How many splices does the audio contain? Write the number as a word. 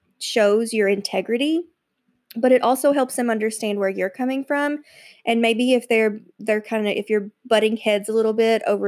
zero